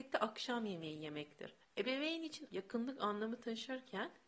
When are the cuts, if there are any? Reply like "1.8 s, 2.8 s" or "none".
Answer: 1.6 s, 2.5 s